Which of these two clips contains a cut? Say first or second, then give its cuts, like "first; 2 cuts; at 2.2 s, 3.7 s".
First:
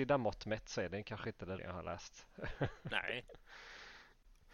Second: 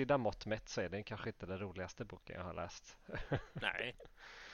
first; 1 cut; at 1.6 s